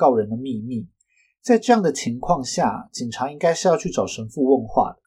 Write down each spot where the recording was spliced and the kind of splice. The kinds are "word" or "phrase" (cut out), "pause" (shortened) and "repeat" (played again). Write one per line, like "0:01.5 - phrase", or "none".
none